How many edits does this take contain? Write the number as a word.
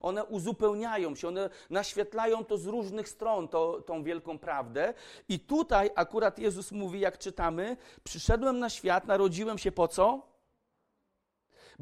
zero